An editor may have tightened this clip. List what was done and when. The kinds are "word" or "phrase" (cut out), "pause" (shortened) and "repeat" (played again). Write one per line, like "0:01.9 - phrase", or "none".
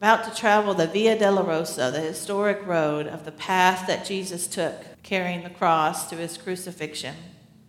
0:04.9 - pause